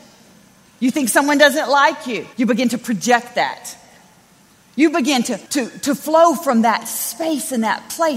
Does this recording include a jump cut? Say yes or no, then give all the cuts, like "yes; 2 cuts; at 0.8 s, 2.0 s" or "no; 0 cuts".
yes; 2 cuts; at 2.3 s, 5.5 s